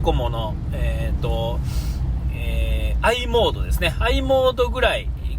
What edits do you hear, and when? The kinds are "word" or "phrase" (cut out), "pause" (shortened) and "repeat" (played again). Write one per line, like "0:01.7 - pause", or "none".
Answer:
none